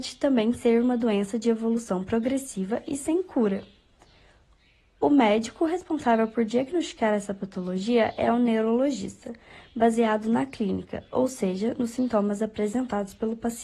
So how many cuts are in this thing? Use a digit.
0